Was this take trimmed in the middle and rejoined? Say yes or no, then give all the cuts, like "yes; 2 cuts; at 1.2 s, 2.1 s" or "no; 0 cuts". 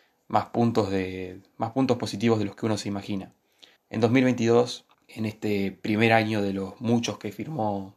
yes; 2 cuts; at 3.8 s, 4.9 s